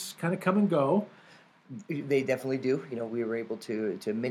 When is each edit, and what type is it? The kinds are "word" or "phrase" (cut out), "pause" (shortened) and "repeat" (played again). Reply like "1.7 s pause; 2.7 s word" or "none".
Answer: none